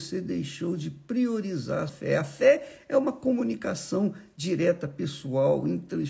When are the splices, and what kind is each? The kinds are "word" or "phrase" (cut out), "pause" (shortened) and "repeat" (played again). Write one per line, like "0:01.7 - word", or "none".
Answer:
0:01.9 - word

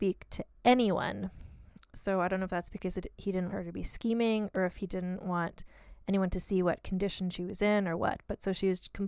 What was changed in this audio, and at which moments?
0:03.5 - word

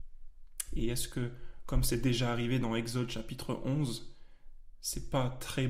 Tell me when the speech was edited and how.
none

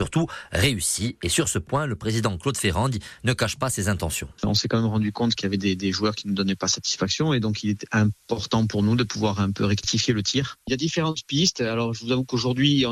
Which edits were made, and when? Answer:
none

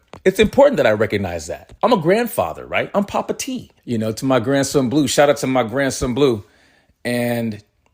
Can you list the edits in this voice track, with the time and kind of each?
0:01.8 - pause
0:03.8 - pause

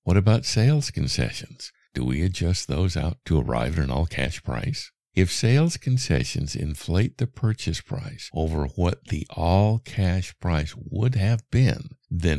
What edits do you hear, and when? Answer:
none

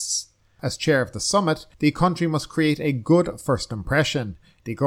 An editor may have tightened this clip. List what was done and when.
0:01.7 - pause

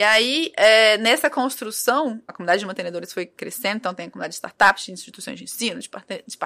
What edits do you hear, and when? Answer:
0:02.3 - word

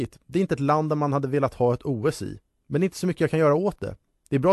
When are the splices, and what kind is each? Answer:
none

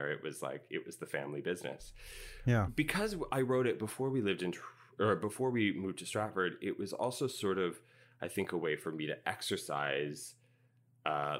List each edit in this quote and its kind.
none

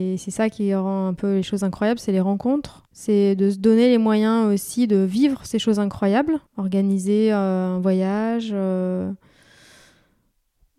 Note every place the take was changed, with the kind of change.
0:02.9 - pause
0:06.5 - pause

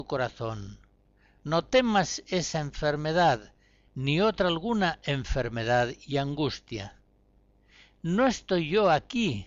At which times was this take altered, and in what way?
none

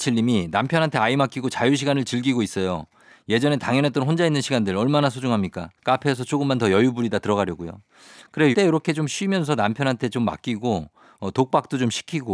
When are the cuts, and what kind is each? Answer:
0:05.8 - pause
0:08.5 - word

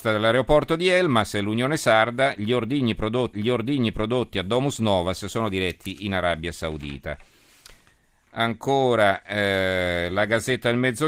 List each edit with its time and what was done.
0:03.3 - repeat

